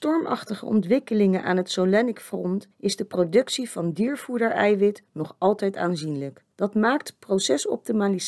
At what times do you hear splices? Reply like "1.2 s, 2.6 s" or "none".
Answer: 2.7 s, 6.5 s